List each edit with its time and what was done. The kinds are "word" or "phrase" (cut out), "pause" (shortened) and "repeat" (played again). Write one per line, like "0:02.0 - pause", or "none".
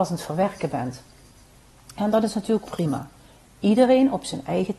0:02.7 - word